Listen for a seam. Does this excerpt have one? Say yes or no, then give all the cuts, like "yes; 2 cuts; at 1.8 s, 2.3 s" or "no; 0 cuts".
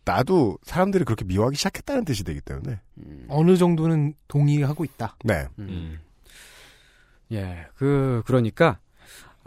no; 0 cuts